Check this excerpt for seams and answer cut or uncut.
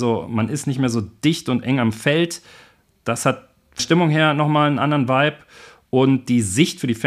cut